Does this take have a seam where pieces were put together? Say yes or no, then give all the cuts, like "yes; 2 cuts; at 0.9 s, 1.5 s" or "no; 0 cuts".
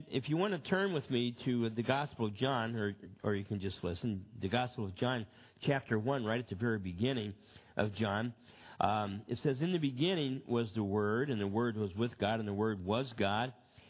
no; 0 cuts